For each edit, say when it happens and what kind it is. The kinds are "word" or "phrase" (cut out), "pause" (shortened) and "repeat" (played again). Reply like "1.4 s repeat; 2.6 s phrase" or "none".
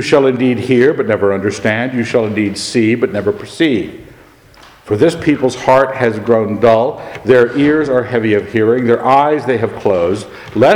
none